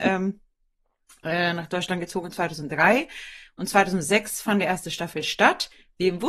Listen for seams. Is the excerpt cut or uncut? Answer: uncut